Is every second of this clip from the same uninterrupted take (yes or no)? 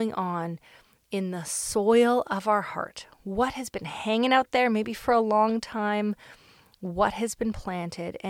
yes